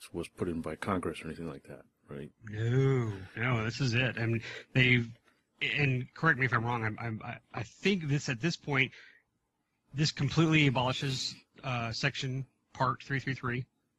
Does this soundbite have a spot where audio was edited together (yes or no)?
no